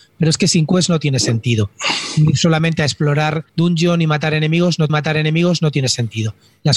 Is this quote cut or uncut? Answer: cut